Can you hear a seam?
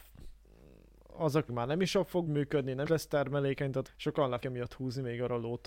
yes; 5 cuts; at 1.5 s, 2.3 s, 2.9 s, 3.9 s, 4.4 s

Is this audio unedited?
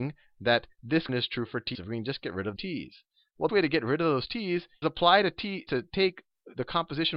no; 6 cuts; at 1.1 s, 1.7 s, 2.6 s, 3.5 s, 4.8 s, 5.7 s

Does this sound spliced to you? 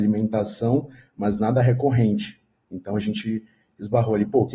no; 0 cuts

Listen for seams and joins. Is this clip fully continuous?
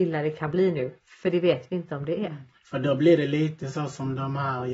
yes; 0 cuts

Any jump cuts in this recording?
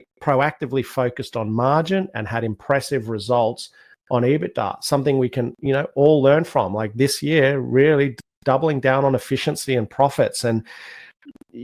no; 0 cuts

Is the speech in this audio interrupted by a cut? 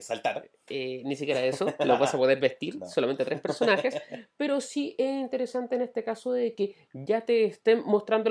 no; 0 cuts

